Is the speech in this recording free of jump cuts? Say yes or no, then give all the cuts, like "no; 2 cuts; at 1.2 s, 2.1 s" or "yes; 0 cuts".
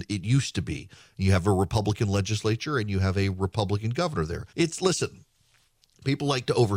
no; 1 cut; at 4.5 s